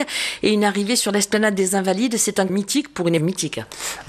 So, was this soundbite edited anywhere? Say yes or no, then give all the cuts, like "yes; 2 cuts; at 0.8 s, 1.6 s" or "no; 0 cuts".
yes; 2 cuts; at 2.5 s, 3.2 s